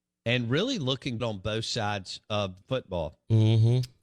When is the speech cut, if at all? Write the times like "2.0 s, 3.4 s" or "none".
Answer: 1.2 s, 2.6 s